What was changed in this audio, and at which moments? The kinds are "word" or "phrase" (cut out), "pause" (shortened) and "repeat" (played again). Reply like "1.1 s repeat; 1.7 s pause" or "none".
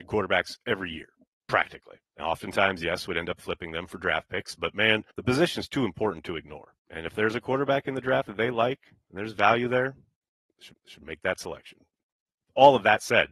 2.1 s pause; 5.1 s pause; 6.8 s pause; 10.7 s repeat